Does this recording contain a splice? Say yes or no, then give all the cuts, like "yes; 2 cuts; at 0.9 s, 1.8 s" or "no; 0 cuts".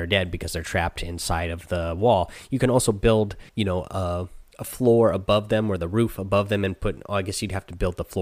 yes; 1 cut; at 3.5 s